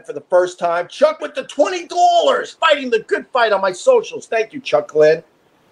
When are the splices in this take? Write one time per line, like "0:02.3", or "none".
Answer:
0:01.2
0:02.6